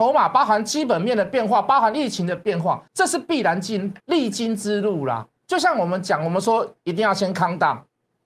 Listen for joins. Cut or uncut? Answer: cut